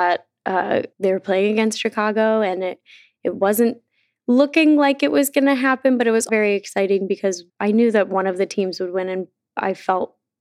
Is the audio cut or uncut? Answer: cut